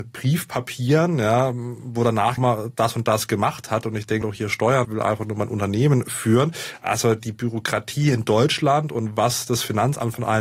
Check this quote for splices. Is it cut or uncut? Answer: cut